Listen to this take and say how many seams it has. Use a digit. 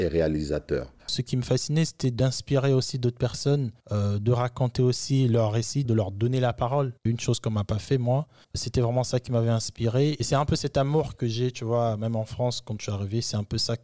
5